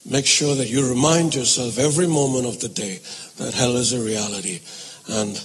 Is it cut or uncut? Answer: uncut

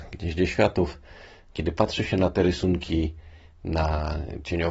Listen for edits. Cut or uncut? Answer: uncut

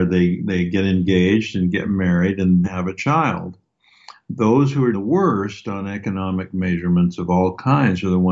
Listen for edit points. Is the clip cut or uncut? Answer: cut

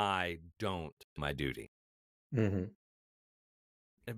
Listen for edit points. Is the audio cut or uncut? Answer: cut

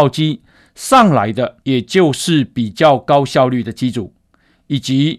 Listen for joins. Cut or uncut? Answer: cut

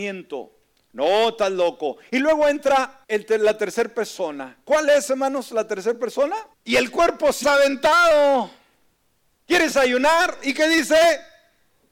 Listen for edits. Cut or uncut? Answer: cut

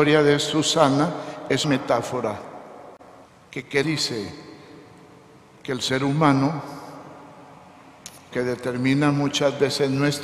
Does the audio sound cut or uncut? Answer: cut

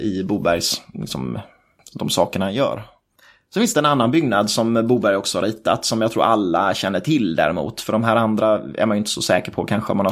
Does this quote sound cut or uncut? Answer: uncut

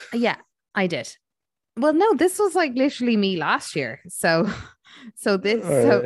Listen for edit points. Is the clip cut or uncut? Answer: uncut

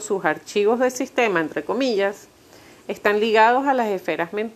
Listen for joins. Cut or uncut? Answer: uncut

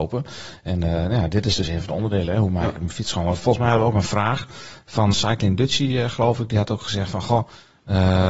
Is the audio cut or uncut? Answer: cut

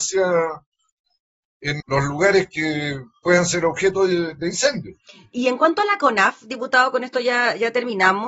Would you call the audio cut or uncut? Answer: cut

